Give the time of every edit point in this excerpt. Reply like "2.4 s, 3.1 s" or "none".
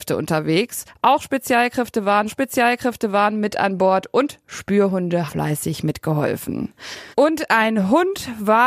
2.3 s, 5.3 s, 7.1 s